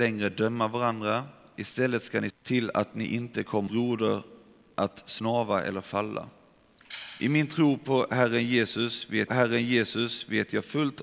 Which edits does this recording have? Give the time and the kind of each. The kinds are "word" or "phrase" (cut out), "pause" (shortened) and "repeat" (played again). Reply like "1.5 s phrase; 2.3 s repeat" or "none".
2.3 s word; 3.7 s word; 9.3 s repeat